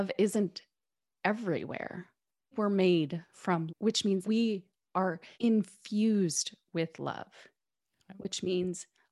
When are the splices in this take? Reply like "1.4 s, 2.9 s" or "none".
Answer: 2.5 s, 3.7 s, 4.2 s, 5.3 s